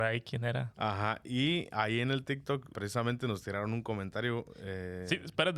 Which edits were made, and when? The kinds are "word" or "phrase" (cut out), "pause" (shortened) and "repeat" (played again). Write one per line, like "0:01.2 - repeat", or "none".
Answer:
0:02.7 - word